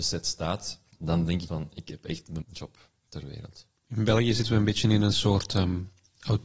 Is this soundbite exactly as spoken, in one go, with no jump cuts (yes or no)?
no